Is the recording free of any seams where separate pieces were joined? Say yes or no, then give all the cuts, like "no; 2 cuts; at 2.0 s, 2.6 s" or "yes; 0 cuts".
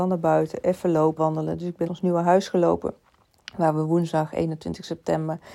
no; 2 cuts; at 1.2 s, 1.9 s